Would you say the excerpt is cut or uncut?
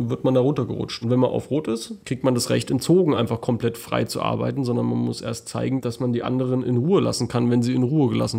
uncut